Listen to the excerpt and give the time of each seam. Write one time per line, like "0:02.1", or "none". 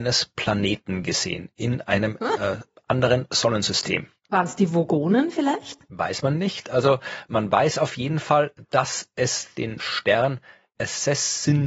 0:09.8